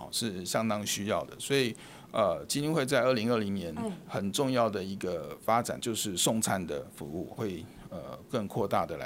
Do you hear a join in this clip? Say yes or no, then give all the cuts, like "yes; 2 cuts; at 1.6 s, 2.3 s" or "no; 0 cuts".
yes; 2 cuts; at 5.8 s, 7.3 s